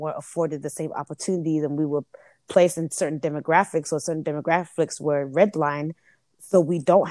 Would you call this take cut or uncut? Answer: uncut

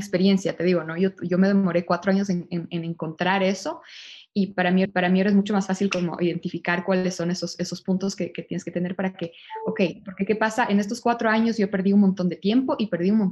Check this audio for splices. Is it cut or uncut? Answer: cut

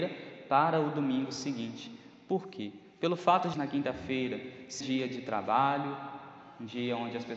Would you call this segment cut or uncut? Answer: cut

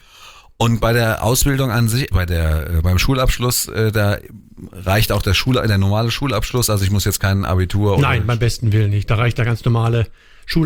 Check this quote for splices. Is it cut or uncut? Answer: cut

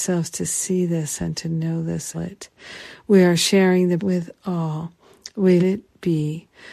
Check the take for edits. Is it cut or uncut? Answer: cut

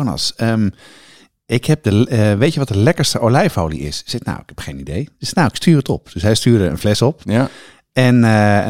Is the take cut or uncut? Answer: uncut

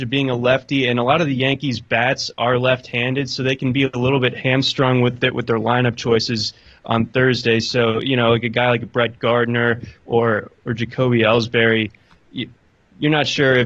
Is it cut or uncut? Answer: uncut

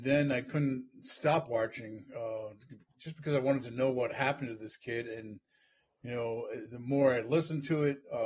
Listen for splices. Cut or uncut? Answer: uncut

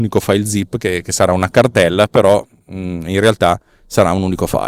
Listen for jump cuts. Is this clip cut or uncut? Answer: uncut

